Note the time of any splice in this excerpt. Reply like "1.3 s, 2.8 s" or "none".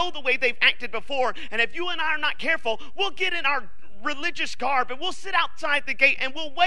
none